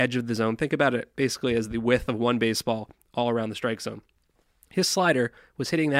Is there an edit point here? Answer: no; 0 cuts

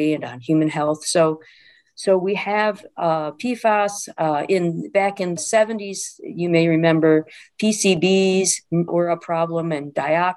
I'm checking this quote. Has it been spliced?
yes; 2 cuts; at 5.4 s, 8.9 s

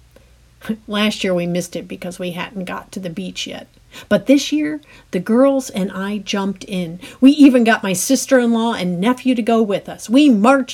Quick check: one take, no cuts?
yes; 0 cuts

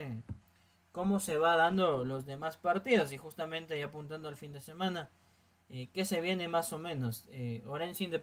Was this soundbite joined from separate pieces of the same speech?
no; 0 cuts

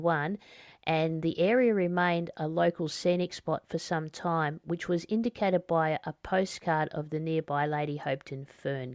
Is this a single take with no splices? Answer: yes; 0 cuts

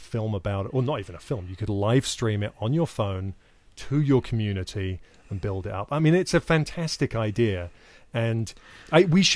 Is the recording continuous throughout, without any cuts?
yes; 0 cuts

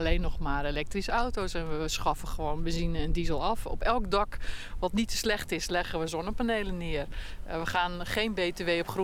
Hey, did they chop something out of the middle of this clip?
no; 0 cuts

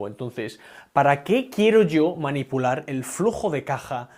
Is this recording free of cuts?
yes; 0 cuts

